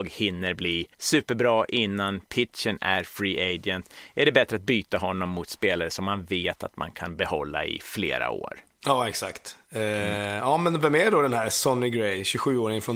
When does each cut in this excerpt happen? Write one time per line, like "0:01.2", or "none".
0:00.9

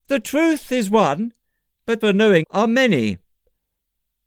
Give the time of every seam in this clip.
0:02.0
0:02.4

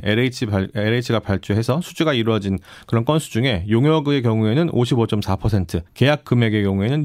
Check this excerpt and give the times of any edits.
0:05.9

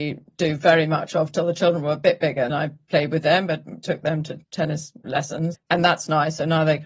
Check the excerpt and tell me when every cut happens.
0:02.5
0:04.4
0:05.5

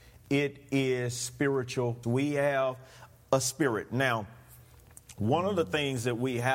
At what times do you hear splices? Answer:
0:02.0

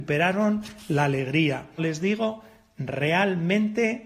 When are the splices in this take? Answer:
0:01.8

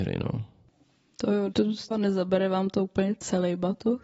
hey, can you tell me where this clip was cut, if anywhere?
0:01.5
0:01.9

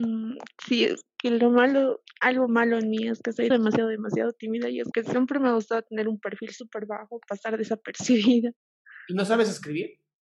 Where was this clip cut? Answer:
0:02.1
0:03.5
0:04.9

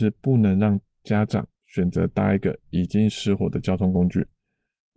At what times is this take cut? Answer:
0:01.5

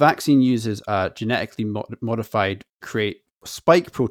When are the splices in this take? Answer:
0:02.8

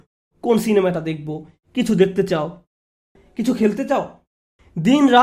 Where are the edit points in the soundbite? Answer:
none

